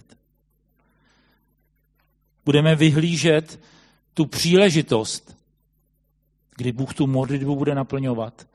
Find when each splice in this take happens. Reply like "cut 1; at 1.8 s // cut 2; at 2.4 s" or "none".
none